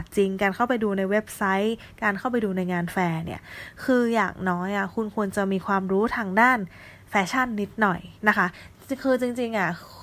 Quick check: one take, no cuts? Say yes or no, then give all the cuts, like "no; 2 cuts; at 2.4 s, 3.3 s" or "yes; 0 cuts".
no; 1 cut; at 8.2 s